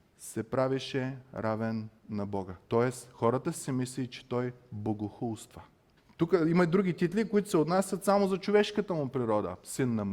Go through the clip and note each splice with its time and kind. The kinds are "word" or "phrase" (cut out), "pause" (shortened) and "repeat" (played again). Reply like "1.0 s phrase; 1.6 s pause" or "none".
2.0 s pause; 6.0 s pause